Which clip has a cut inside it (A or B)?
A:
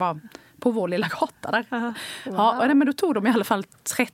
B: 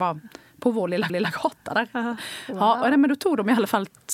B